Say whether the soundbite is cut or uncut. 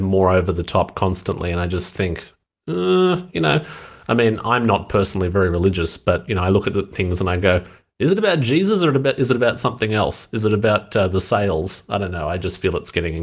uncut